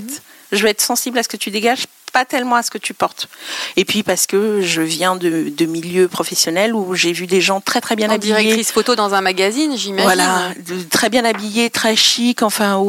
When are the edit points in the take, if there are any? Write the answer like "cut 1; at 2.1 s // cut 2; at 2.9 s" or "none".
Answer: none